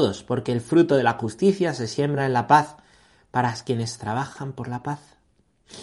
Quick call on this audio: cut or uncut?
uncut